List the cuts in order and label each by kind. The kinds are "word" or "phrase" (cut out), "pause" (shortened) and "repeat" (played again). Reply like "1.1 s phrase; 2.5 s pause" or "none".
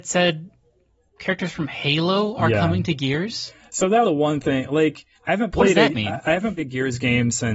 4.0 s word; 5.1 s pause; 6.6 s word